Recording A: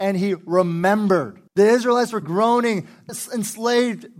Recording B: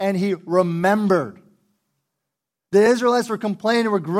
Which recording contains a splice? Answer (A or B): A